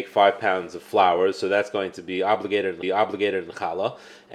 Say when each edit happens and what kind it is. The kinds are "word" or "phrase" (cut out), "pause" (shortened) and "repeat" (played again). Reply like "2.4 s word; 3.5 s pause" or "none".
2.8 s repeat